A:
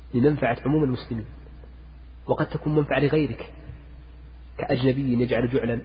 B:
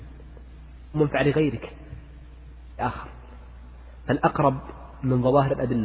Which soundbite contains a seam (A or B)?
B